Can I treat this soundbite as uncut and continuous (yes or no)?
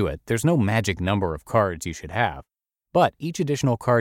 yes